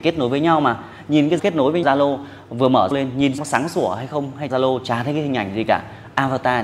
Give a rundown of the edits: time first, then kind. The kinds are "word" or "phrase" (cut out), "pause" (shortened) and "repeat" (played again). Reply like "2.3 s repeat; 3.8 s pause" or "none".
1.4 s word; 1.8 s word; 2.9 s word; 3.4 s word; 4.5 s word